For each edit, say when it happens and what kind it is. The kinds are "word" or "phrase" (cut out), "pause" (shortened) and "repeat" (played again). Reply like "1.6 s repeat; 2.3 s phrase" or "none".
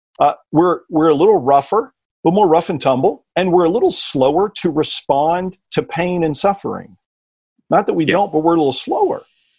2.1 s pause; 3.3 s pause